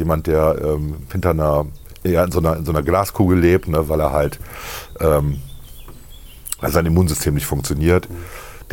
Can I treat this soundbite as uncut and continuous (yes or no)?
yes